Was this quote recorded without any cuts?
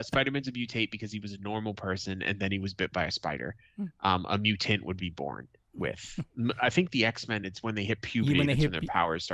yes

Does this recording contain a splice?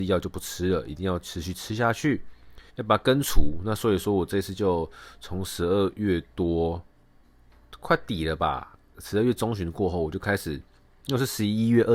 yes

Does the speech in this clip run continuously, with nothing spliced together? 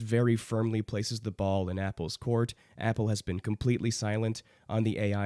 yes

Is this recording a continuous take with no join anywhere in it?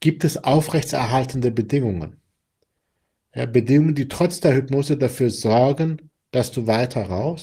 yes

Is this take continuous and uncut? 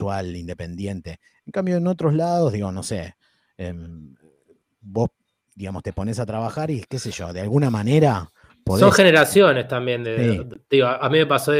yes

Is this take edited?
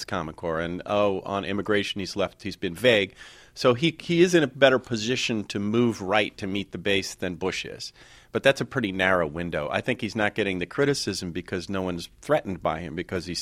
no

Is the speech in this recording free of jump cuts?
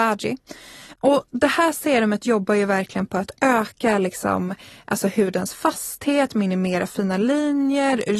yes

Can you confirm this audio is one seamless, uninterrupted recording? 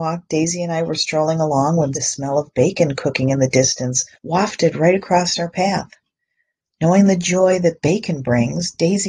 no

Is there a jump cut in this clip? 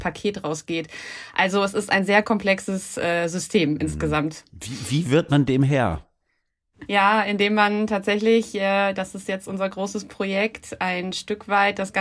no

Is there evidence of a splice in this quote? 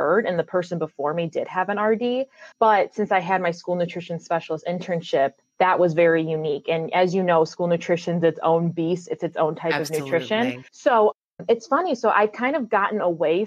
yes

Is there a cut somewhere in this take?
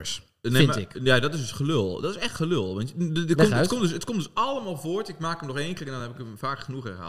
no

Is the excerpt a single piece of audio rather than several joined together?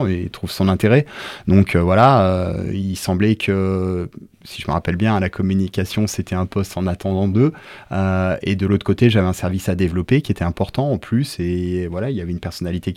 yes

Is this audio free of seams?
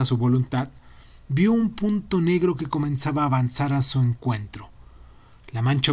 yes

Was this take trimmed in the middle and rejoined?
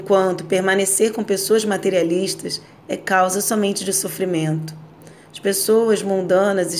no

